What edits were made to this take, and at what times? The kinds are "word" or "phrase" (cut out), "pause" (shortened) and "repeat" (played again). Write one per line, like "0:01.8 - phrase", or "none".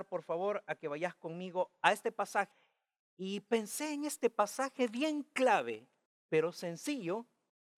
none